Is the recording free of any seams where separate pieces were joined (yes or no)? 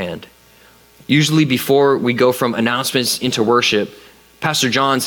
yes